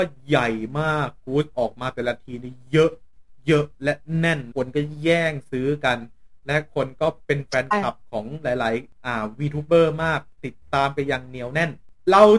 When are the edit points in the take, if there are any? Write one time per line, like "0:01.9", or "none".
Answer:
0:04.5